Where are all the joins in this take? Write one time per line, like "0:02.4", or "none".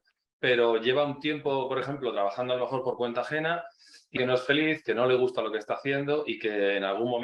0:04.2